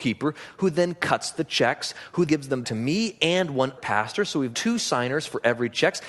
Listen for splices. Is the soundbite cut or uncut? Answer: cut